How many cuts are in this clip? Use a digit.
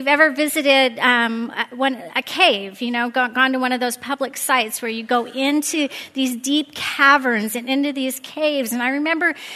0